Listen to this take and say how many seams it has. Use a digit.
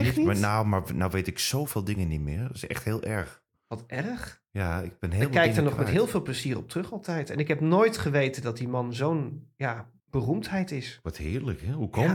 1